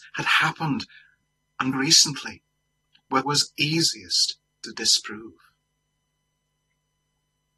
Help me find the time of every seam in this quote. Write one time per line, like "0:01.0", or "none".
0:01.7
0:03.2